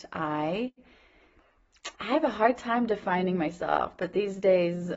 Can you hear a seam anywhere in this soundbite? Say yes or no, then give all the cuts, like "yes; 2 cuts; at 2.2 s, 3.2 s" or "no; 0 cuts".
yes; 1 cut; at 1.9 s